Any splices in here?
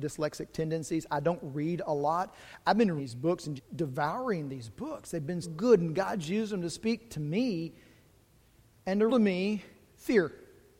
yes; 4 cuts; at 3.0 s, 3.6 s, 5.4 s, 9.1 s

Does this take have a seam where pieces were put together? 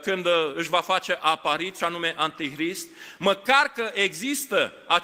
yes; 1 cut; at 1.8 s

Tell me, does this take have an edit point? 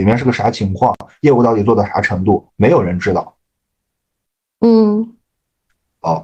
no; 0 cuts

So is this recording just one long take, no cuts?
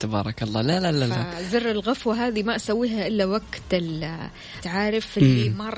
no; 1 cut; at 4.6 s

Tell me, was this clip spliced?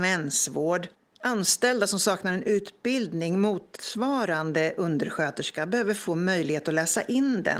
no; 0 cuts

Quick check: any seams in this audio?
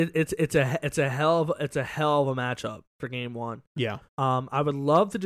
yes; 2 cuts; at 2.9 s, 4.1 s

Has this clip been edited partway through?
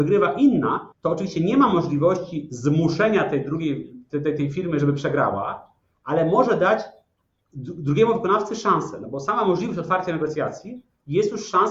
yes; 1 cut; at 0.9 s

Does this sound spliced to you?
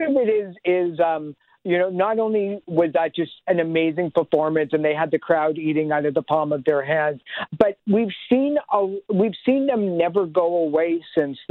yes; 1 cut; at 7.5 s

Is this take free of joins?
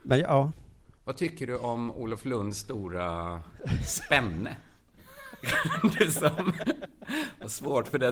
yes; 0 cuts

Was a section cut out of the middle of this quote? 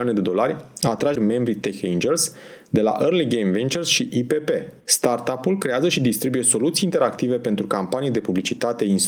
yes; 2 cuts; at 1.2 s, 4.8 s

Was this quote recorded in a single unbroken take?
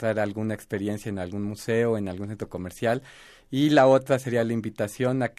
yes; 0 cuts

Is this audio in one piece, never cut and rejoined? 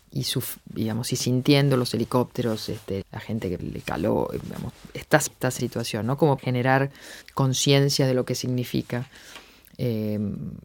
no; 7 cuts; at 3.0 s, 3.6 s, 4.4 s, 5.3 s, 5.6 s, 6.4 s, 7.2 s

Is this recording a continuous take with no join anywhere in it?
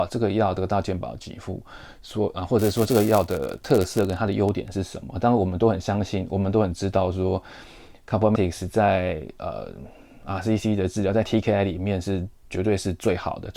no; 1 cut; at 8.4 s

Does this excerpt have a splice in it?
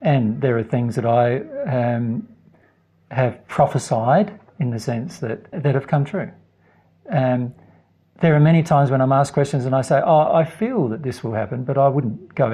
yes; 1 cut; at 5.5 s

